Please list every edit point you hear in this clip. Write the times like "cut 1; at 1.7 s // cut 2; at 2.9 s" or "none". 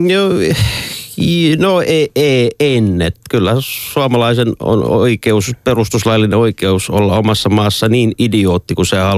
none